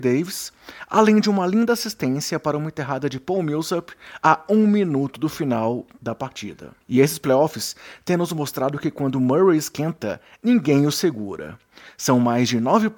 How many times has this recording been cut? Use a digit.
1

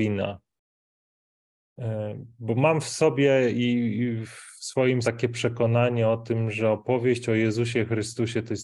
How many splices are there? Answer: 1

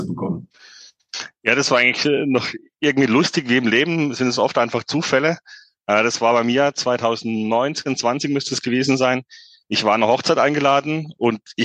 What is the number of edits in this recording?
0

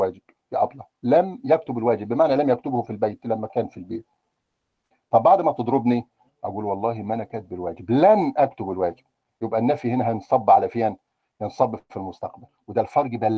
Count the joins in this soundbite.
0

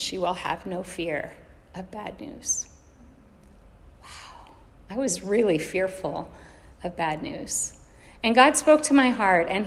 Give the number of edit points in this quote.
0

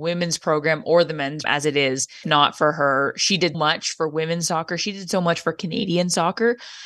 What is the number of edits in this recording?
3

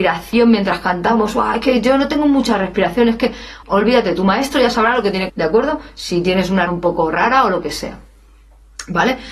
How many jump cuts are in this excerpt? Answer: 3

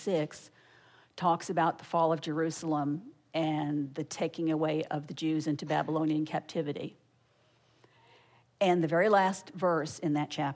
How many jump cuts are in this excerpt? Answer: 0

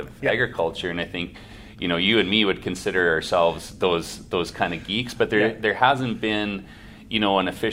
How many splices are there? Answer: 0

